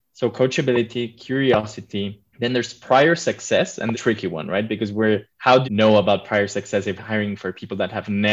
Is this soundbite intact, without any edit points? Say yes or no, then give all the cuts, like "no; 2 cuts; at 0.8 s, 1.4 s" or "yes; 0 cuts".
no; 5 cuts; at 2.3 s, 3.9 s, 5.3 s, 5.6 s, 7.0 s